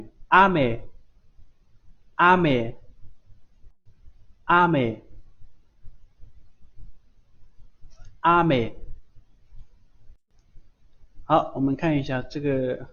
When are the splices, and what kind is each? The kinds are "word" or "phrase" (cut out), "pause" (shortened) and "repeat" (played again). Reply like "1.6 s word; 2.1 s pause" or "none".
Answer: 11.1 s pause